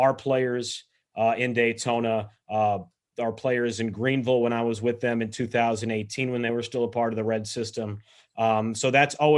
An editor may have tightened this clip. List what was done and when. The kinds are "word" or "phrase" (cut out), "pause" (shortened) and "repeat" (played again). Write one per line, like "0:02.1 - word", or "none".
none